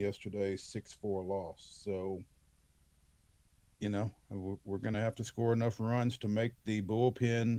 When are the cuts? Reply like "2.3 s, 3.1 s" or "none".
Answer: none

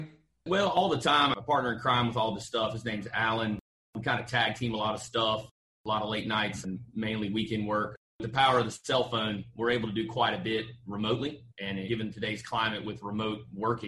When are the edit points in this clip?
8.1 s, 11.5 s

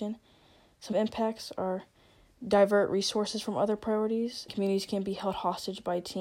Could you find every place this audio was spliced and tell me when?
0.9 s, 4.5 s

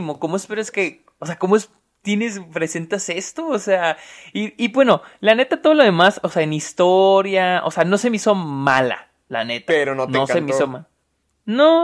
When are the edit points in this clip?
none

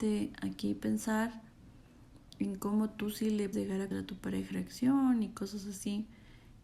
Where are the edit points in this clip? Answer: 3.5 s, 3.9 s, 4.5 s

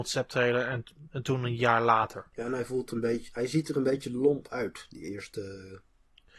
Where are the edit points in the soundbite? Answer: 2.3 s

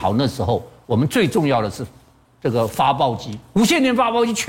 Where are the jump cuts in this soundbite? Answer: 3.4 s

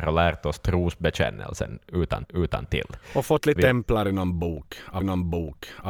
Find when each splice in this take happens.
2.2 s, 3.6 s, 5.0 s

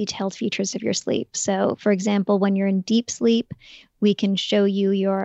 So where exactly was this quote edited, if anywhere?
none

